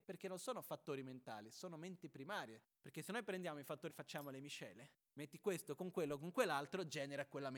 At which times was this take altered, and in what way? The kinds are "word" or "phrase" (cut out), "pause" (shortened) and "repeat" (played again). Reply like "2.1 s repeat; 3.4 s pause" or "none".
2.8 s pause; 3.9 s word; 5.0 s pause